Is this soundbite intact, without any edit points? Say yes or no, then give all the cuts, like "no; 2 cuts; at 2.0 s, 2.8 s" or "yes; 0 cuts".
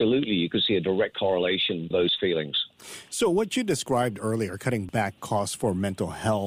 no; 2 cuts; at 1.9 s, 5.2 s